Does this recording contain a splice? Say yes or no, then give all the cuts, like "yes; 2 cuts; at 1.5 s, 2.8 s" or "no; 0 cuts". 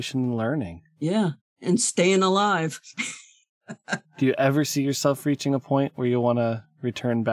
no; 0 cuts